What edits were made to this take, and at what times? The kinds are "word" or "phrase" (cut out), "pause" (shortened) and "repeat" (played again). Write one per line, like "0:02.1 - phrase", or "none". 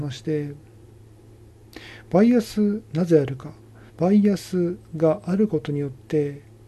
0:03.9 - pause